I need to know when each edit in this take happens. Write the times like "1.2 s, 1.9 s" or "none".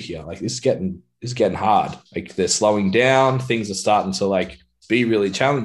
2.1 s